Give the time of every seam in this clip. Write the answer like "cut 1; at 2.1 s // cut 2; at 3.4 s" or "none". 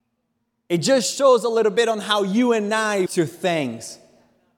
cut 1; at 3.1 s